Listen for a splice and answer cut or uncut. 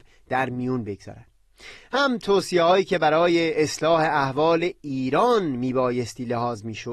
uncut